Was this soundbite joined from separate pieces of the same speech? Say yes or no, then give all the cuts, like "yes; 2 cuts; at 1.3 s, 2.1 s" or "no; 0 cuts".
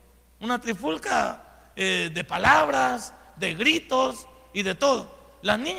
no; 0 cuts